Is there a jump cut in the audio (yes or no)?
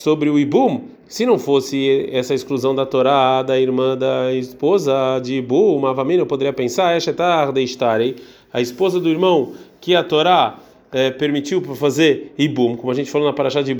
no